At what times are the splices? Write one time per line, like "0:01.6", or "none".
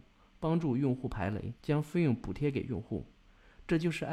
0:01.6

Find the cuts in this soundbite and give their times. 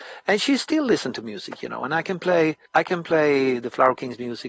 0:02.7

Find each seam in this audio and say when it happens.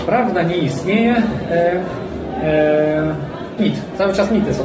0:03.6

